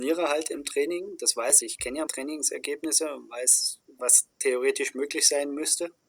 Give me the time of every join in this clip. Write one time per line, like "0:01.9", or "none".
0:01.6
0:02.1